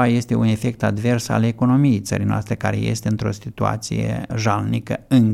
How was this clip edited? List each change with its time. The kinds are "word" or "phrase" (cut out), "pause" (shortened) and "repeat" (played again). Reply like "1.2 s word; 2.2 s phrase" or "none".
4.3 s word

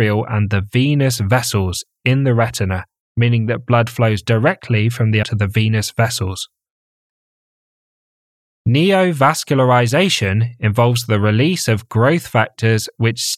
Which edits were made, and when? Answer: 5.2 s word

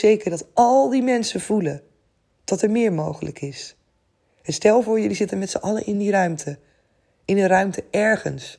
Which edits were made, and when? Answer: none

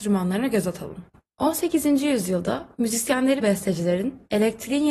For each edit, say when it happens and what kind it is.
3.4 s word

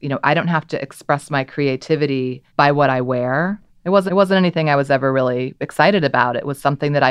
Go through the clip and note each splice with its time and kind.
2.5 s pause; 3.7 s pause; 4.1 s repeat

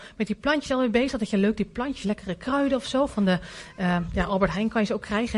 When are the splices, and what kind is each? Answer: 2.0 s phrase

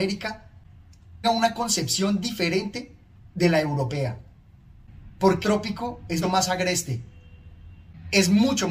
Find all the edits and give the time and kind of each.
1.2 s word; 3.3 s pause; 5.4 s word; 6.2 s word

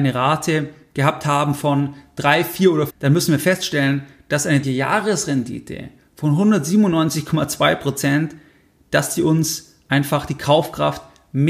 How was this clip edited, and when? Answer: 2.9 s phrase; 4.6 s word

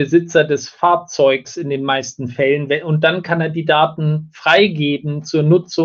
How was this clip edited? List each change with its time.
none

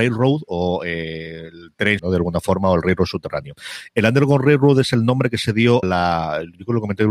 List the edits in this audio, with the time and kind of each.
2.0 s word; 5.8 s word

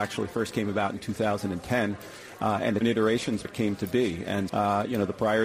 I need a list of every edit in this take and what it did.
2.8 s phrase; 3.4 s word; 4.5 s word

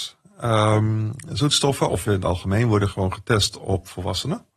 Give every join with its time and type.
2.1 s word

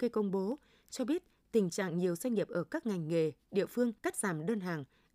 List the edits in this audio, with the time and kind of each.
4.0 s pause

